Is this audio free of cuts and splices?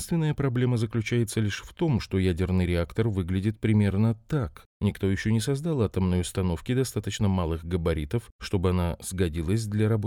yes; 0 cuts

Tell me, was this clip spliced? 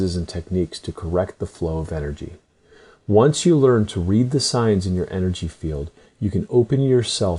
no; 0 cuts

